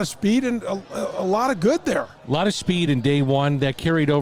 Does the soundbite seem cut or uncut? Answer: uncut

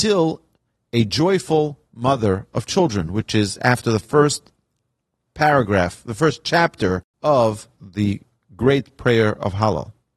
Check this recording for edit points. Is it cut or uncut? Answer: cut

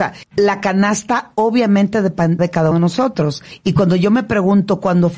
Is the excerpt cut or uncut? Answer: cut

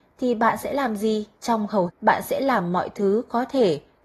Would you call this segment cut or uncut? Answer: cut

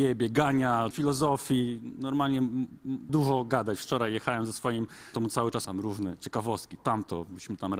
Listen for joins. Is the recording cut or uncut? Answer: cut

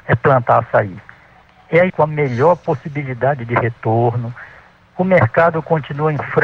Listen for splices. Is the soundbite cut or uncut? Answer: cut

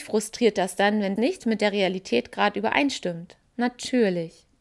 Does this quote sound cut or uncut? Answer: cut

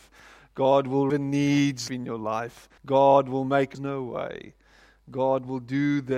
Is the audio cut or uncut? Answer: cut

